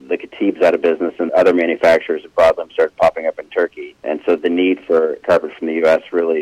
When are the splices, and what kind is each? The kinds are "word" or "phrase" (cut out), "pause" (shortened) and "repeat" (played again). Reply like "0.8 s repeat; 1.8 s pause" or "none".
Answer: 1.3 s word; 5.2 s word